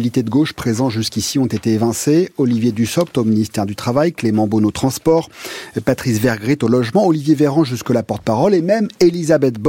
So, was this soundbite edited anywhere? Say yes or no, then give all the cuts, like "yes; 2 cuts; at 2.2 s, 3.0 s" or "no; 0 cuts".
no; 0 cuts